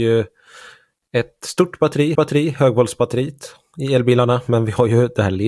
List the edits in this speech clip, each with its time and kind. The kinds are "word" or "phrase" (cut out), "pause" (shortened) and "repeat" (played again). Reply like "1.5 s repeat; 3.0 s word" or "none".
2.2 s repeat